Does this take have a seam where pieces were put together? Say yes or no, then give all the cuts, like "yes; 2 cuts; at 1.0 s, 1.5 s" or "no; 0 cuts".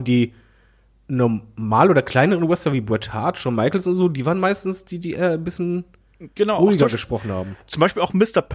no; 0 cuts